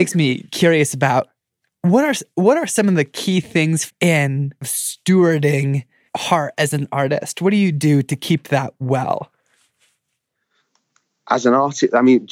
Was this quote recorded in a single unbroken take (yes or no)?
no